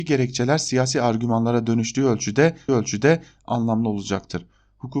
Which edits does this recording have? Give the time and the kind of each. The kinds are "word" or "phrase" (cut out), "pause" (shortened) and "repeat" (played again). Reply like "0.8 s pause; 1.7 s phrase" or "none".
2.7 s repeat